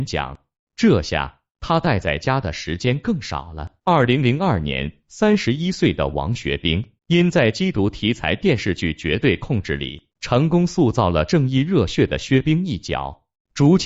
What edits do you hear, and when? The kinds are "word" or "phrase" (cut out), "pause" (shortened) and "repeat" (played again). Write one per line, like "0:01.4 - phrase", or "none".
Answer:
0:03.8 - pause
0:07.0 - pause
0:10.1 - pause